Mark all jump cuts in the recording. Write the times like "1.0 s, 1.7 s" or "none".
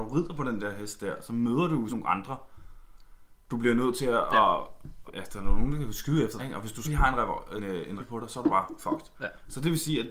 1.9 s, 3.5 s, 5.1 s, 6.4 s, 6.8 s, 7.6 s, 8.0 s